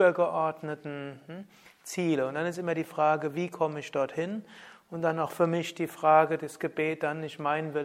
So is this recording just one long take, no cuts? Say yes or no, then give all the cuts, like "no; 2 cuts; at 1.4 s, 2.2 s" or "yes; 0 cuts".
yes; 0 cuts